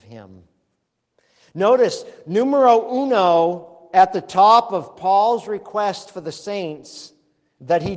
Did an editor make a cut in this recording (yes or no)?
no